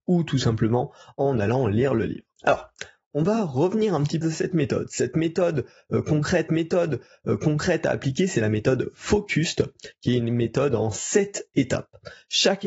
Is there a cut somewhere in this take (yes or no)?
yes